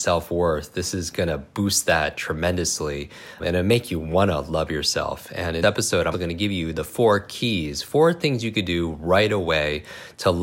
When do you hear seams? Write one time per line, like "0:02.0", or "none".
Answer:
0:03.4
0:05.6
0:06.1